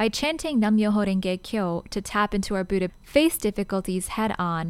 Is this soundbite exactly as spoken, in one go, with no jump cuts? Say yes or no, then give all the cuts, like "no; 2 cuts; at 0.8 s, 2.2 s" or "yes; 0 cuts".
no; 1 cut; at 2.9 s